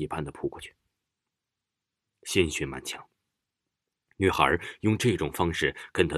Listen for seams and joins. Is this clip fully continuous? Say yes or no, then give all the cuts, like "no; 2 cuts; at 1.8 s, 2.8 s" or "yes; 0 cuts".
yes; 0 cuts